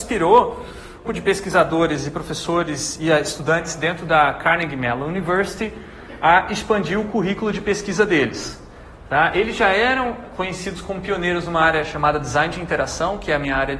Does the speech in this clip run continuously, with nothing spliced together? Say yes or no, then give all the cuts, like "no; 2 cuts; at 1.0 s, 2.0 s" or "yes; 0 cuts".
no; 1 cut; at 1.1 s